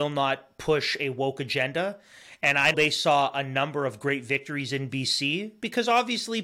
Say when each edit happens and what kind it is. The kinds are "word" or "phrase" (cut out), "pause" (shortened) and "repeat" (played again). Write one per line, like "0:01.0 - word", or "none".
0:02.7 - word